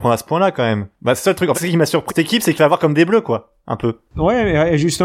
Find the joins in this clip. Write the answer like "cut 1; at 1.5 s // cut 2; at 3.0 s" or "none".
cut 1; at 1.5 s // cut 2; at 2.1 s // cut 3; at 2.6 s